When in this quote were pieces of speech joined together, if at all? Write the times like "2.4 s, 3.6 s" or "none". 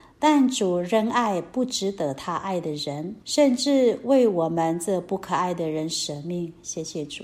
3.2 s